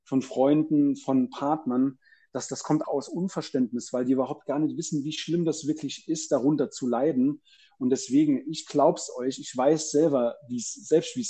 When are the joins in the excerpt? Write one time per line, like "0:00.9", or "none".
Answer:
0:02.8